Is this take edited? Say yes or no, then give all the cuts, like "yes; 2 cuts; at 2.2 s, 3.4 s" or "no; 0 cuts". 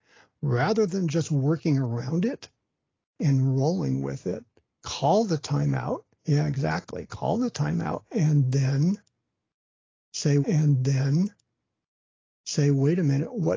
yes; 1 cut; at 10.4 s